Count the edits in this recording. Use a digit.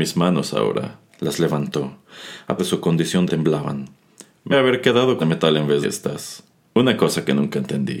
7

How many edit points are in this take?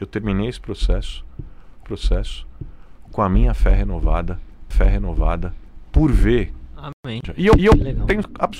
3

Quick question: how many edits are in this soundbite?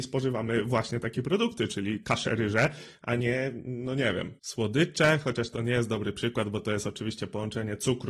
1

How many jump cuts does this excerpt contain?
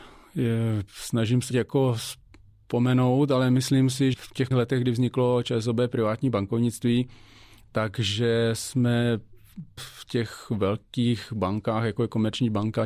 4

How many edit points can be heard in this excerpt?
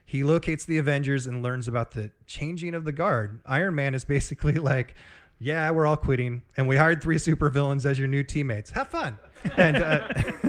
0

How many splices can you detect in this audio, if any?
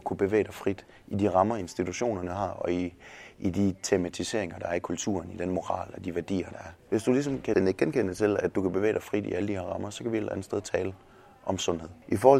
1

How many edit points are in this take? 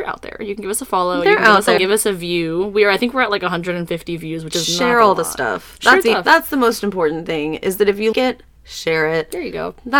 3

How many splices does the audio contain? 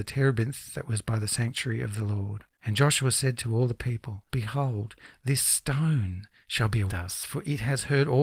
3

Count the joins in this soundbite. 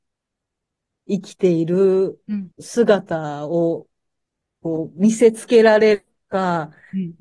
1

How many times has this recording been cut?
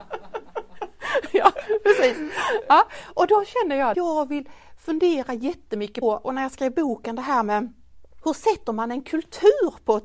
2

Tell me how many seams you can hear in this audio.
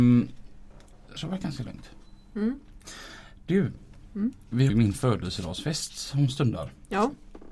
2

